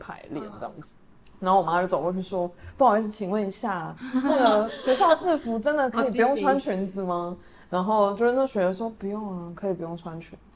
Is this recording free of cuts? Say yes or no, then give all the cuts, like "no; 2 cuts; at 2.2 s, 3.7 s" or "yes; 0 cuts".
no; 1 cut; at 1.2 s